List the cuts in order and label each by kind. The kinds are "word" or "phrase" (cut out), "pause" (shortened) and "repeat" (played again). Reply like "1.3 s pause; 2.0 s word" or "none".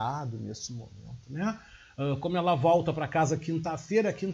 none